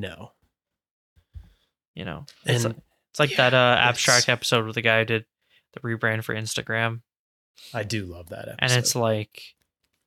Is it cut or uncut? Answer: uncut